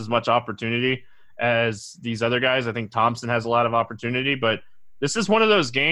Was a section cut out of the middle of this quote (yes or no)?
no